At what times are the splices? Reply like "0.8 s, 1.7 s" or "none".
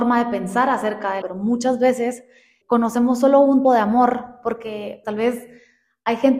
1.2 s, 2.6 s, 3.6 s, 5.0 s

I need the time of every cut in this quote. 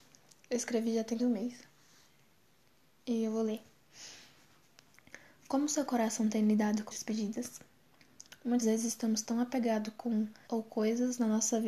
1.2 s, 6.9 s, 8.6 s, 10.5 s

